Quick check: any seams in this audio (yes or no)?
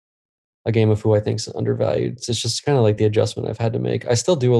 no